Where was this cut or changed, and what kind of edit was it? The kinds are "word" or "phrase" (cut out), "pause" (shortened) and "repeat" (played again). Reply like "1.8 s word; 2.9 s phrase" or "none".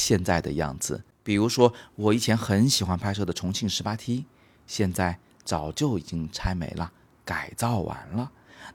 1.1 s pause